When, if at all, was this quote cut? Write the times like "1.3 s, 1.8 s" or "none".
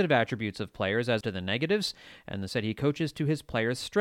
1.2 s, 2.5 s